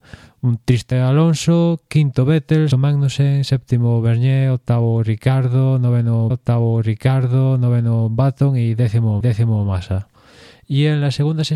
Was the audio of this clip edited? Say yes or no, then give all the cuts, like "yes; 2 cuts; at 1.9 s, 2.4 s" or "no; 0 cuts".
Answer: yes; 4 cuts; at 0.9 s, 2.7 s, 6.3 s, 9.2 s